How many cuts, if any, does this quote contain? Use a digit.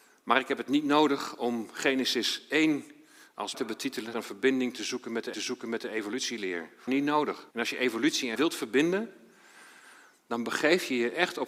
6